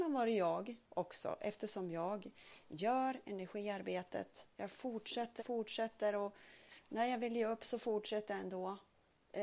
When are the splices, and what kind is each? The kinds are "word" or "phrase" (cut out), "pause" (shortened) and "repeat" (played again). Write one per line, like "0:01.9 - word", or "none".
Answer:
0:04.5 - pause
0:05.4 - word